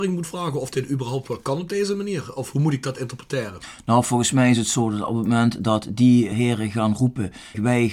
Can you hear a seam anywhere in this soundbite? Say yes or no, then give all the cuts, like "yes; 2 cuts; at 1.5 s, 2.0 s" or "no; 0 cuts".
no; 0 cuts